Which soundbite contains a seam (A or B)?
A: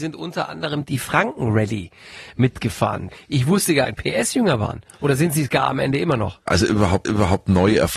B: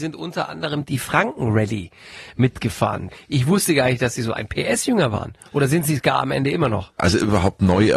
A